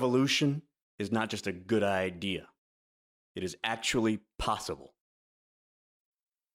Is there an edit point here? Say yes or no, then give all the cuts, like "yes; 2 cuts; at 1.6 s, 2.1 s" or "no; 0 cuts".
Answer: no; 0 cuts